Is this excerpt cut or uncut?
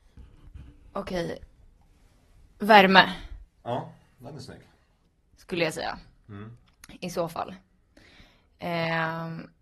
uncut